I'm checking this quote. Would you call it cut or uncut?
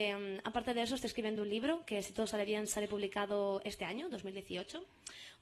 uncut